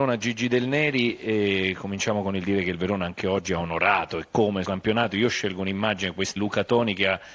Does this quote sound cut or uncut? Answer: cut